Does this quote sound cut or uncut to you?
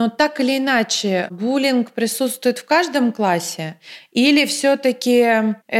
uncut